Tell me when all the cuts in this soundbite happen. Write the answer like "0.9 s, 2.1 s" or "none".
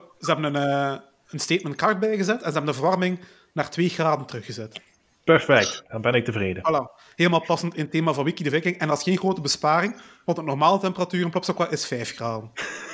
none